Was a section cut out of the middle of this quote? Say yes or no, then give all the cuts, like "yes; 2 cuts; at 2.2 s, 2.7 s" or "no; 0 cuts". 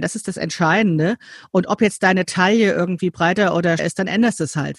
yes; 1 cut; at 3.8 s